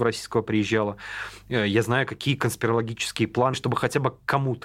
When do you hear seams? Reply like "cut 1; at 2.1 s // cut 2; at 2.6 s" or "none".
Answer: cut 1; at 3.5 s